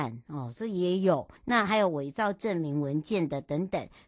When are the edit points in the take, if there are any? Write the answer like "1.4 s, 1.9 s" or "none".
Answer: 1.4 s